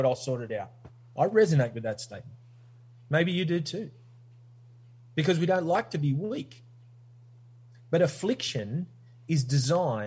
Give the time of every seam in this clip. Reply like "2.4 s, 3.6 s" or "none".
none